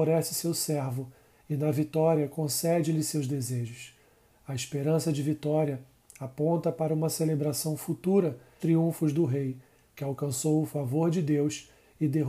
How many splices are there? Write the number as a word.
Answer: one